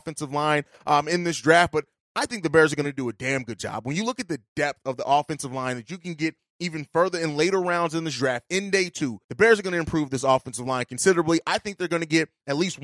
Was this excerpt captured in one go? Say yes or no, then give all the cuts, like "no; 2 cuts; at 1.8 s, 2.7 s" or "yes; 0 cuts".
yes; 0 cuts